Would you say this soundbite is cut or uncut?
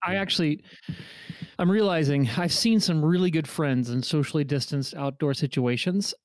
cut